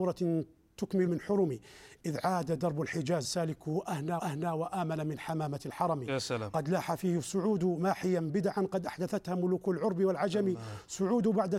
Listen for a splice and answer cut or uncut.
cut